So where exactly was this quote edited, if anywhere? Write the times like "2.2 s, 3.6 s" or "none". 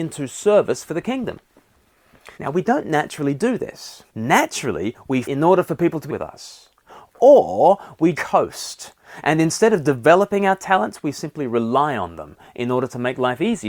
2.3 s, 4.1 s, 5.2 s, 6.1 s, 8.1 s